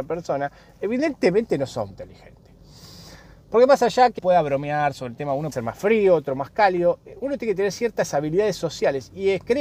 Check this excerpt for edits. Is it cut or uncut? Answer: cut